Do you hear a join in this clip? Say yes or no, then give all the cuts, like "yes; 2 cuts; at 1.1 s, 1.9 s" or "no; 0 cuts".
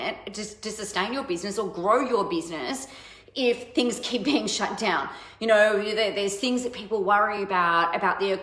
no; 0 cuts